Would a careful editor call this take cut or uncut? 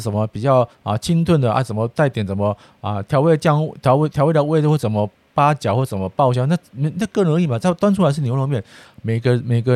uncut